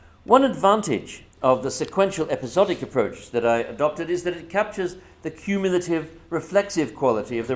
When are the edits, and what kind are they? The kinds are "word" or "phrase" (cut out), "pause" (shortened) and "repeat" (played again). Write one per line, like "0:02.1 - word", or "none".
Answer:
0:01.3 - pause